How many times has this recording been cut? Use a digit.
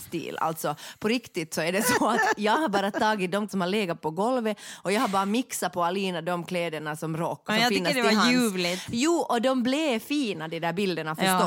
2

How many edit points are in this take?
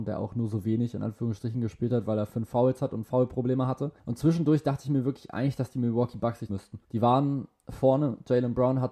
3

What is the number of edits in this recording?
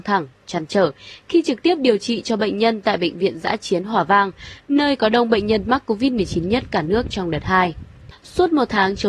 0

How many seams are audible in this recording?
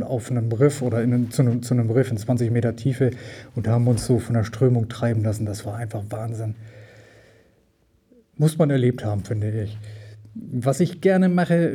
0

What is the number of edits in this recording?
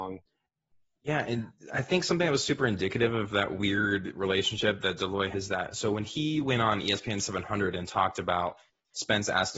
1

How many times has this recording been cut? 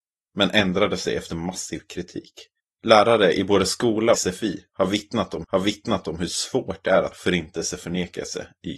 4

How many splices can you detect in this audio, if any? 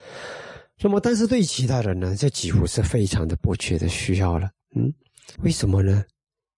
1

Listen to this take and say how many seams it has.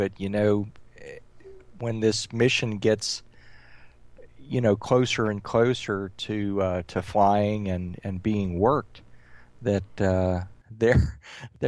0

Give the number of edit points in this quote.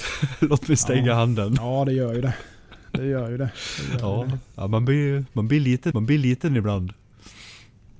1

